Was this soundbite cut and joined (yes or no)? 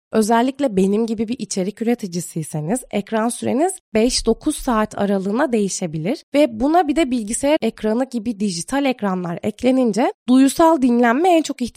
no